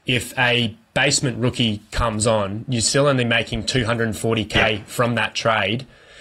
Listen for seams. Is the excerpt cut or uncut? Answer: uncut